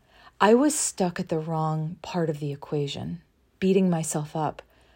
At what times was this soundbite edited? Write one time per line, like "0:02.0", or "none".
none